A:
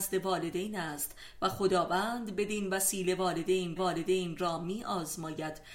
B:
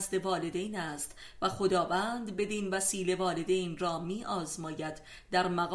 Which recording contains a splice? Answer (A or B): A